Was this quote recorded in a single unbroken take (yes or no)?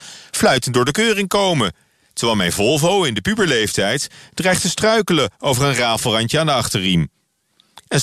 yes